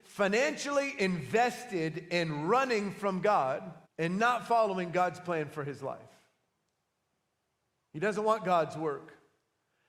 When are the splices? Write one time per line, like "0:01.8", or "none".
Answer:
0:03.9